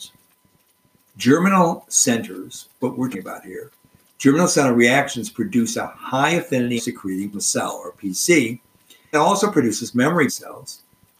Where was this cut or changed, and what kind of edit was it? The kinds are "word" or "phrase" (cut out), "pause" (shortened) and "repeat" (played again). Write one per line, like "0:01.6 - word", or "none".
0:02.8 - word
0:03.1 - word
0:06.8 - word
0:07.3 - word
0:09.1 - word
0:10.3 - word